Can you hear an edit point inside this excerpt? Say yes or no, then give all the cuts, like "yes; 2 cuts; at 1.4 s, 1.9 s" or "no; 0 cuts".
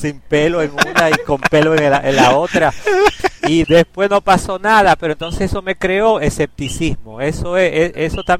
yes; 1 cut; at 3.6 s